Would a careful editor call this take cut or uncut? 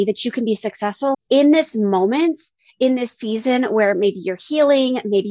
cut